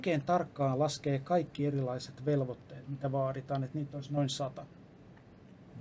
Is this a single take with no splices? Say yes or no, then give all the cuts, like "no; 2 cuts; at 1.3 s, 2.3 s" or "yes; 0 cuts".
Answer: yes; 0 cuts